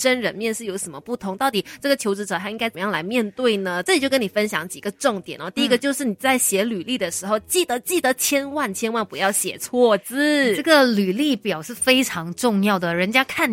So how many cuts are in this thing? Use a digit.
0